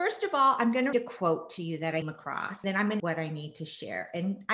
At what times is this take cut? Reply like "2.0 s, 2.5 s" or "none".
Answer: 0.9 s, 2.0 s, 2.6 s, 3.0 s